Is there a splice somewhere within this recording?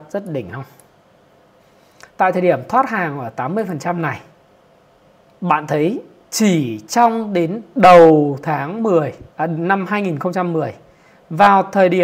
yes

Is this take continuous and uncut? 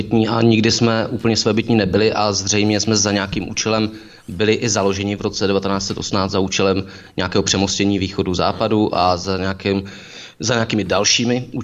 yes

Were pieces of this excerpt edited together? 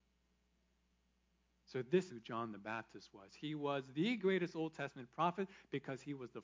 yes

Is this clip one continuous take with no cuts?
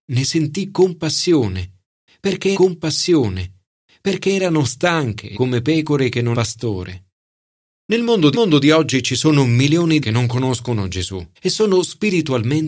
no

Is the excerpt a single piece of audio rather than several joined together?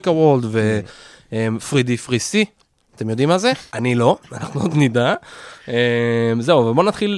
no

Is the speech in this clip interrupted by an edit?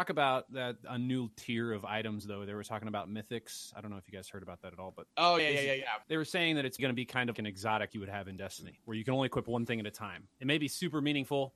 yes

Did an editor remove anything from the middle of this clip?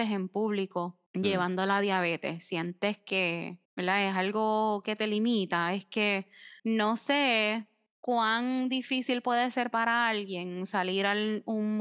yes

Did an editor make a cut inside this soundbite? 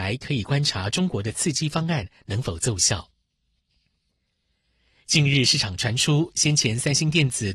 no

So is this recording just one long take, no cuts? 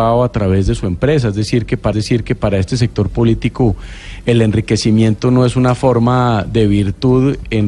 no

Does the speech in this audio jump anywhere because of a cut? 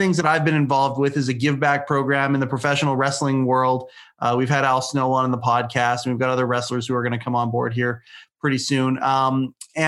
no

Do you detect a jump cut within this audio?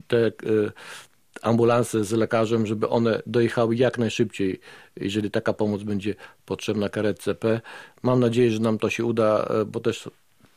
no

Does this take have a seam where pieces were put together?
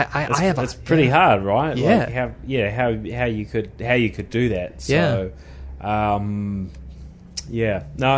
no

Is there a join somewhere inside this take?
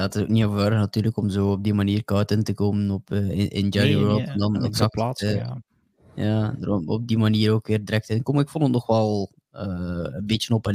no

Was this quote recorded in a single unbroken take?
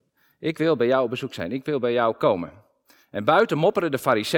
yes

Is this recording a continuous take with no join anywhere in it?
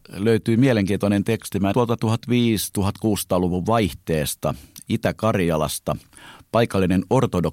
no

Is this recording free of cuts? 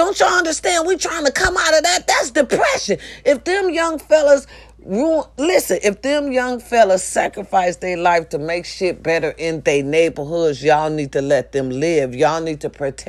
yes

